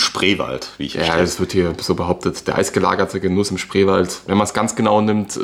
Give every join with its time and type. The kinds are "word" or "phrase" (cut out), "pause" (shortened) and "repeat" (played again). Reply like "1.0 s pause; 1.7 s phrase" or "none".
3.5 s word